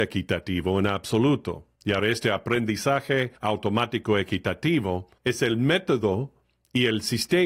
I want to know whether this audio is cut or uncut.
cut